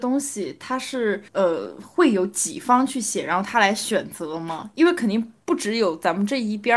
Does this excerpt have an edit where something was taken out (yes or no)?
yes